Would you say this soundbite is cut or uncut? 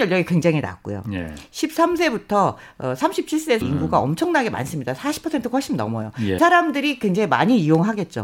cut